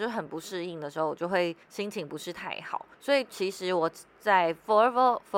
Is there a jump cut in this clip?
yes; 2 cuts; at 1.6 s, 2.9 s

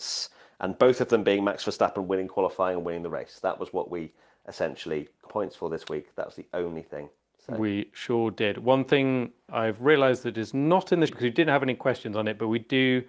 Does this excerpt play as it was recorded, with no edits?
no; 3 cuts; at 5.3 s, 9.5 s, 11.1 s

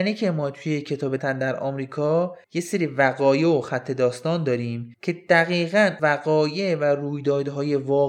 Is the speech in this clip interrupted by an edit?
yes; 4 cuts; at 1.2 s, 2.4 s, 4.9 s, 6.0 s

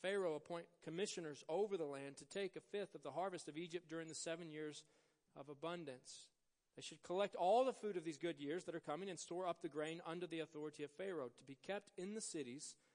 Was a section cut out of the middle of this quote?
no; 0 cuts

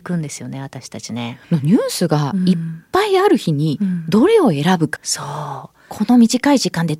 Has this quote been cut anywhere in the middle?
yes; 2 cuts; at 1.4 s, 5.0 s

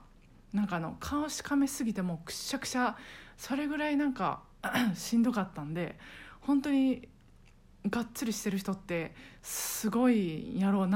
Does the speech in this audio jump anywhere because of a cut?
no; 0 cuts

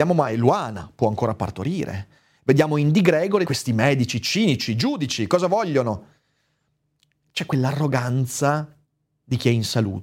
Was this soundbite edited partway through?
yes; 1 cut; at 3.4 s

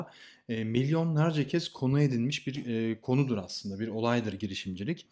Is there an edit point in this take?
no; 0 cuts

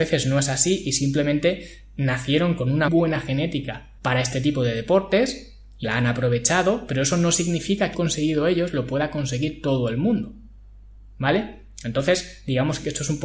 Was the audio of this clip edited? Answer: yes; 4 cuts; at 2.9 s, 4.0 s, 5.8 s, 7.9 s

